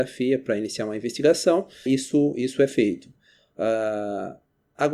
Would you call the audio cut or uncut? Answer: cut